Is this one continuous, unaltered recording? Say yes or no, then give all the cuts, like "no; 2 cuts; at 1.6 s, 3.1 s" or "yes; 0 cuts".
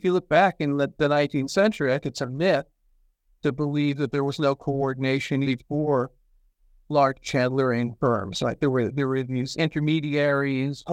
no; 2 cuts; at 2.0 s, 5.4 s